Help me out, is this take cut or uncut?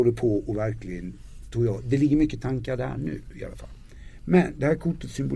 uncut